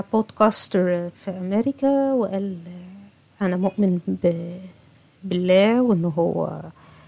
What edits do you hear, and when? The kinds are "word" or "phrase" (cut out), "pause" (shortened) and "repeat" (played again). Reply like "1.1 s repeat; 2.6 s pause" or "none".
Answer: none